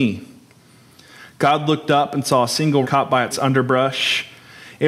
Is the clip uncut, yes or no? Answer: no